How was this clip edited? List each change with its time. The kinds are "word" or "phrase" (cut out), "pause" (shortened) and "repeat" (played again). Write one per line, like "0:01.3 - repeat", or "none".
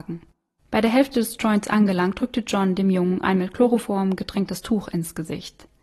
none